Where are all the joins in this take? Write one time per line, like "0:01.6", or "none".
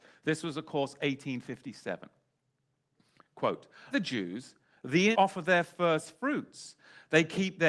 0:03.9
0:05.1